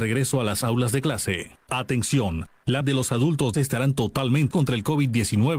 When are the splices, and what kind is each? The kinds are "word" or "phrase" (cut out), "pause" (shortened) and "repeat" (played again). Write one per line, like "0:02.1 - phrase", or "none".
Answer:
0:01.6 - pause
0:02.8 - word
0:03.5 - phrase
0:04.5 - word